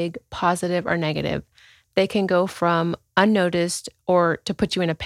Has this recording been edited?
no; 0 cuts

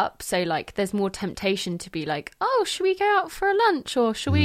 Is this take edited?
no; 0 cuts

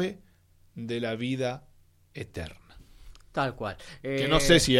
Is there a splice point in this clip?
no; 0 cuts

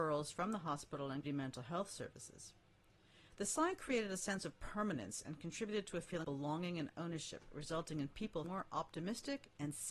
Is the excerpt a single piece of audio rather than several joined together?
no; 3 cuts; at 1.2 s, 6.2 s, 8.4 s

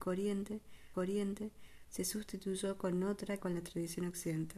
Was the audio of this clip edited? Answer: yes; 2 cuts; at 0.9 s, 3.4 s

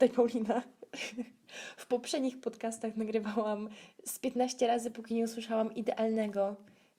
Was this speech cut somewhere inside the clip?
no; 0 cuts

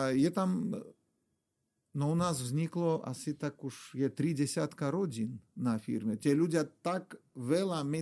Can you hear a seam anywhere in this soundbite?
no; 0 cuts

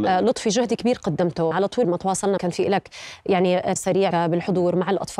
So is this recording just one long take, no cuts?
no; 5 cuts; at 1.5 s, 1.8 s, 2.4 s, 3.8 s, 4.1 s

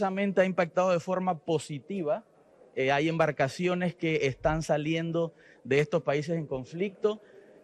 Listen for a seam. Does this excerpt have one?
no; 0 cuts

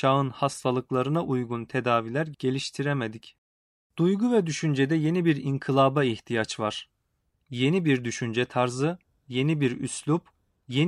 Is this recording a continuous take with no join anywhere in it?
yes; 0 cuts

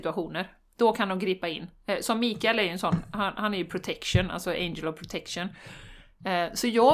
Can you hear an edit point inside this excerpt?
no; 0 cuts

